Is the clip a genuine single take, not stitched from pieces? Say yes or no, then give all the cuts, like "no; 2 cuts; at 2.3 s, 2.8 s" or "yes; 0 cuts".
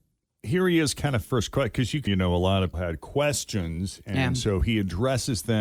no; 3 cuts; at 1.2 s, 2.1 s, 2.7 s